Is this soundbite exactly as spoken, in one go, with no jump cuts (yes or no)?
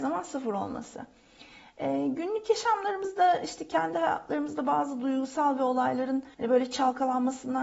no